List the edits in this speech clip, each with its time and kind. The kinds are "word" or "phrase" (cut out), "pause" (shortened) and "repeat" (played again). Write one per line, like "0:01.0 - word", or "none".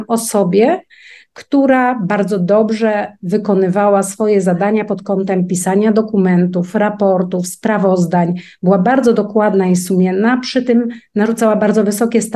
none